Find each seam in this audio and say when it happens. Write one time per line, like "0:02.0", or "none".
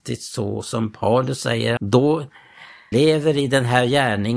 0:01.8
0:02.9